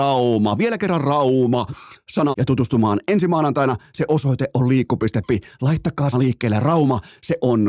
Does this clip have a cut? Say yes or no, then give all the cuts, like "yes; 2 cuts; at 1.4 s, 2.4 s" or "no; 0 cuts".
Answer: yes; 2 cuts; at 2.3 s, 6.1 s